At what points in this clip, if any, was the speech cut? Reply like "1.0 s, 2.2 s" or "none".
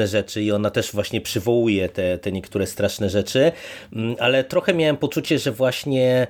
none